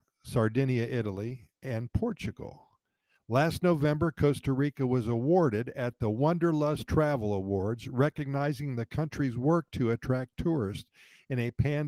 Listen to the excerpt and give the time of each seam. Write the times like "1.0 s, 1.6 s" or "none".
none